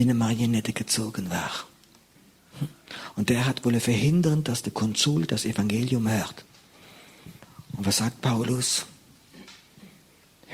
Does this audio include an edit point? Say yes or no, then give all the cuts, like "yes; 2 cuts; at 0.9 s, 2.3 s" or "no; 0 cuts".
no; 0 cuts